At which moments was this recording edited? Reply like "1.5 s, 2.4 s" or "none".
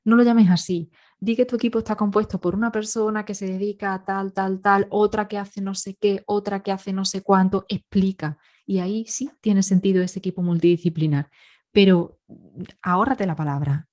none